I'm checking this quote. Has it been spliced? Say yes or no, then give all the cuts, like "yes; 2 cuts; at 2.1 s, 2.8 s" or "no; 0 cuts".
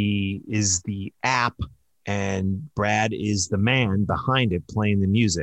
no; 0 cuts